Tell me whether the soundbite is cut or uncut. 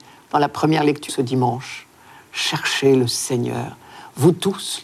cut